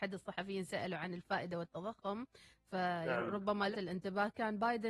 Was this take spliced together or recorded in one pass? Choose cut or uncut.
cut